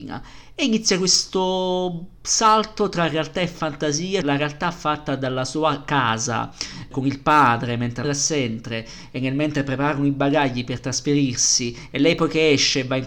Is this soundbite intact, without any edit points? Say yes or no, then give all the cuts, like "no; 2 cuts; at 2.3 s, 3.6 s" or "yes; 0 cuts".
no; 3 cuts; at 4.2 s, 6.9 s, 8.0 s